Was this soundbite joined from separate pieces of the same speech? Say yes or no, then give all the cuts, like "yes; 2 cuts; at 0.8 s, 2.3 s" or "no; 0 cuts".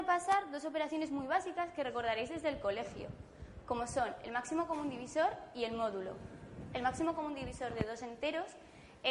no; 0 cuts